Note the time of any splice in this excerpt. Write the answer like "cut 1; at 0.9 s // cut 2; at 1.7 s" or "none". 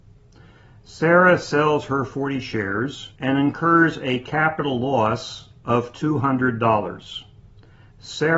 cut 1; at 3.1 s // cut 2; at 5.6 s

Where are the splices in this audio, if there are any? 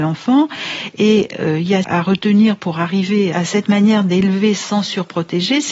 cut 1; at 1.8 s

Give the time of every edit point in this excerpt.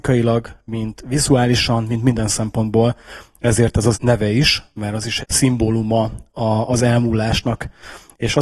cut 1; at 3.9 s // cut 2; at 5.2 s

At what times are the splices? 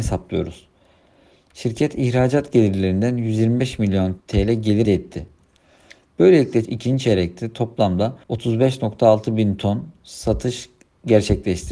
cut 1; at 4.2 s // cut 2; at 4.8 s // cut 3; at 6.6 s // cut 4; at 8.2 s

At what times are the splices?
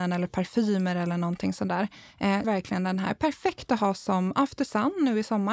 cut 1; at 2.4 s

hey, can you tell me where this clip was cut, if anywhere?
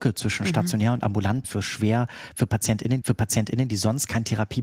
cut 1; at 1.4 s // cut 2; at 3.0 s

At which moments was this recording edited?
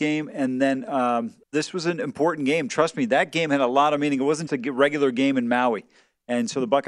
cut 1; at 1.4 s // cut 2; at 4.5 s

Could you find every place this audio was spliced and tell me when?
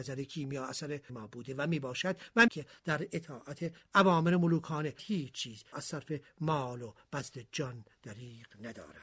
cut 1; at 1.1 s // cut 2; at 2.5 s // cut 3; at 5.0 s // cut 4; at 5.7 s

